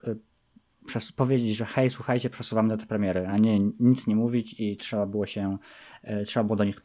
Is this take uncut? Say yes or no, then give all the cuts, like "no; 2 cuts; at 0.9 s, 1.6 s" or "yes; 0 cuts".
yes; 0 cuts